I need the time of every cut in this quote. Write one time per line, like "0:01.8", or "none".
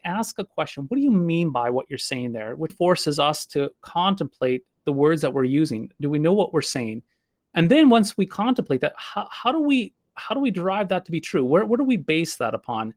0:02.7